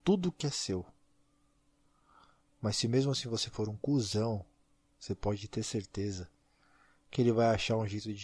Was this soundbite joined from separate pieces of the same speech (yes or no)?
no